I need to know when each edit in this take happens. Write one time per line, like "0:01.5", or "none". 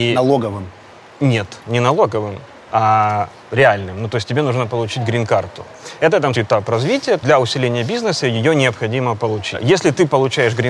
0:06.3
0:07.2